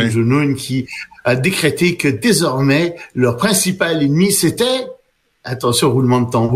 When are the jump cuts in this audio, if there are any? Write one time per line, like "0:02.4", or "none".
none